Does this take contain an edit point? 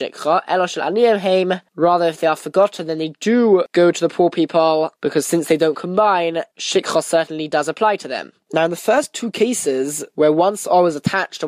no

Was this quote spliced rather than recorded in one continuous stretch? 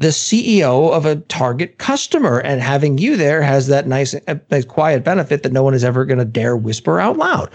no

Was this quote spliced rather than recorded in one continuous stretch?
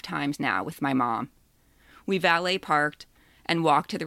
no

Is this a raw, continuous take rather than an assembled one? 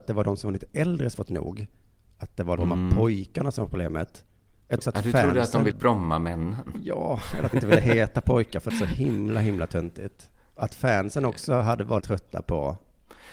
no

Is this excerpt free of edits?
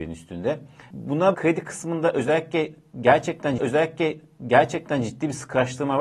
no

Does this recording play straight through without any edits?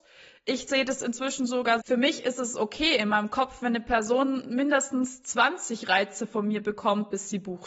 no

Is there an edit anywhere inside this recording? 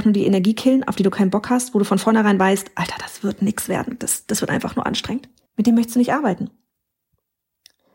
yes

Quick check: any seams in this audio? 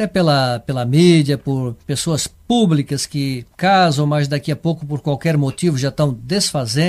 yes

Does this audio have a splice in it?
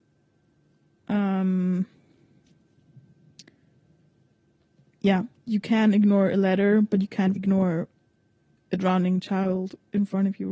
yes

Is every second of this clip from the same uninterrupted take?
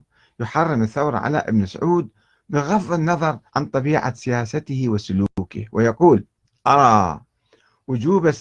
no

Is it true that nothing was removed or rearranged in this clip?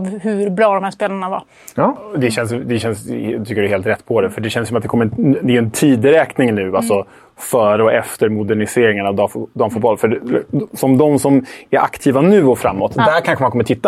yes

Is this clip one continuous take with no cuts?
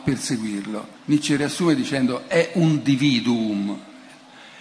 no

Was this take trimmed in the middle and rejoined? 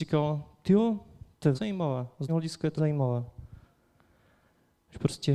yes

